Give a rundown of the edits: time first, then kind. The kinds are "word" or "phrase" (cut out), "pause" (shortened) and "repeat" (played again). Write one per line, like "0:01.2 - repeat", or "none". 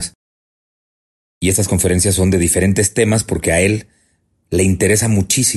none